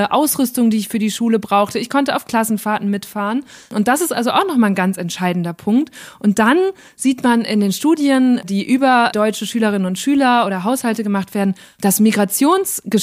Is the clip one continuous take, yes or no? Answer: yes